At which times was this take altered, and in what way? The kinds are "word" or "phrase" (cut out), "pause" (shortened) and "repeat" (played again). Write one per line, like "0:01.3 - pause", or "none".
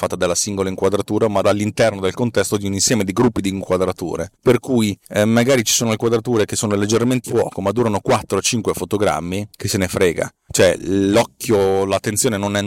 0:01.4 - word
0:04.3 - pause
0:05.0 - pause
0:07.2 - word
0:09.5 - pause